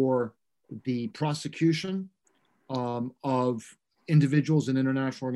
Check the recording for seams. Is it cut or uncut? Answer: uncut